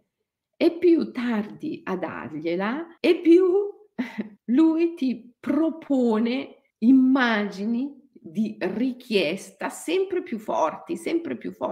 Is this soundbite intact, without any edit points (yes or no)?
no